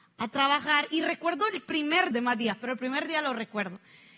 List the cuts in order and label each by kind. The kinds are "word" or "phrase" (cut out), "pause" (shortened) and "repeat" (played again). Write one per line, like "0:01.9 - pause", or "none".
0:02.1 - phrase

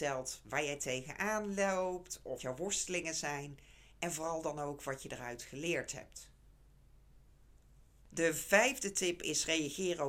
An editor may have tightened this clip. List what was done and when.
0:02.4 - word

